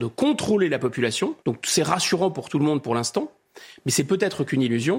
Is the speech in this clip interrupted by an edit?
yes; 1 cut; at 1.4 s

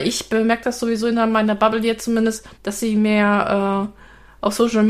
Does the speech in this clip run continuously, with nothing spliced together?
no; 1 cut; at 2.5 s

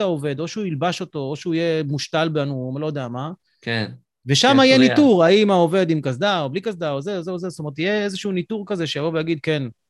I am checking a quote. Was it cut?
no; 0 cuts

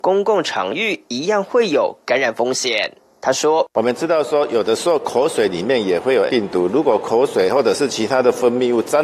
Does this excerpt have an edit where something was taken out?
yes; 1 cut; at 6.3 s

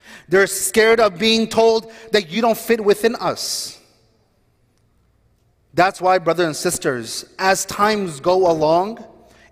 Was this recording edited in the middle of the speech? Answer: no; 0 cuts

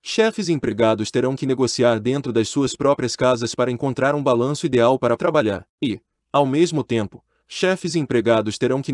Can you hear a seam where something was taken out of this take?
yes; 2 cuts; at 5.2 s, 5.7 s

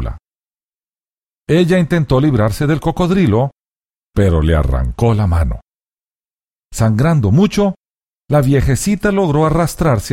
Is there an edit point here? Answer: no; 0 cuts

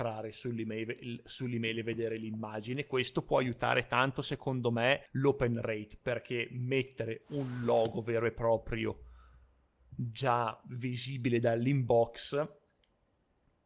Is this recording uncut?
no; 1 cut; at 5.1 s

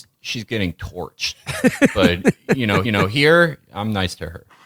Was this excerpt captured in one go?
no; 1 cut; at 2.8 s

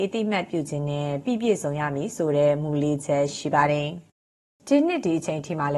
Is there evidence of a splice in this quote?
no; 0 cuts

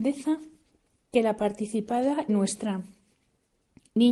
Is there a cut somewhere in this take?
yes; 1 cut; at 2.3 s

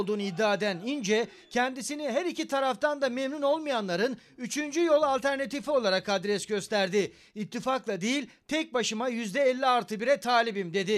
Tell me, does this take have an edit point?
no; 0 cuts

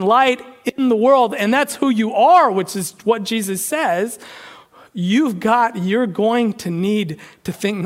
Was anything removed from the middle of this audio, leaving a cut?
no; 0 cuts

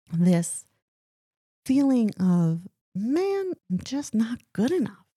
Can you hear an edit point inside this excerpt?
yes; 1 cut; at 3.6 s

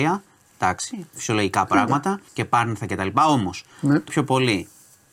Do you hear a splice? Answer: yes; 3 cuts; at 1.1 s, 2.3 s, 4.1 s

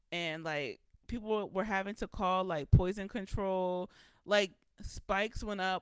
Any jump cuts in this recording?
no; 0 cuts

